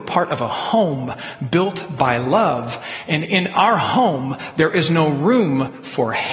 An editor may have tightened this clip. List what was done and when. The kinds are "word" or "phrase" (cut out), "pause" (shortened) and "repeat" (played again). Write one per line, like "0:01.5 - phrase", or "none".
none

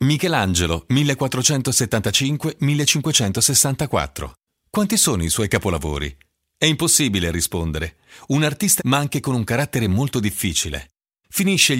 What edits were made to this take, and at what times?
0:08.8 - word

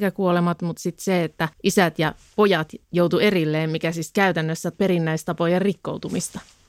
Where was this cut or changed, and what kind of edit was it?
0:01.5 - pause
0:02.8 - pause
0:04.7 - word

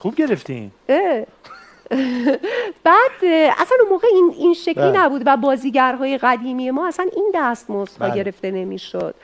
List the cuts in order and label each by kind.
none

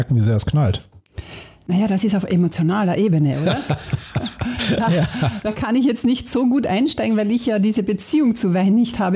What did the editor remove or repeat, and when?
none

